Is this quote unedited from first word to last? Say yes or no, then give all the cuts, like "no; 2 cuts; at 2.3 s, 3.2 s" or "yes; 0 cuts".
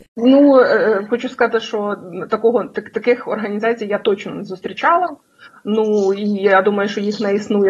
yes; 0 cuts